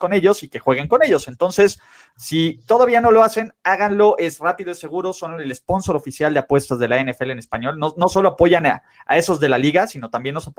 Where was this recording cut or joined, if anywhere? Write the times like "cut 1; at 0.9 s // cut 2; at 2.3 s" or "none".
none